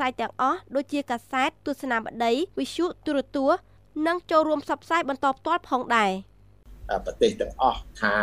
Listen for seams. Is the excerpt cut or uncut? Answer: cut